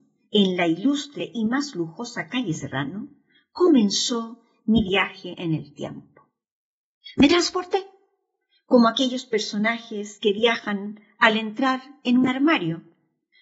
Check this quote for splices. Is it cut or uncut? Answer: uncut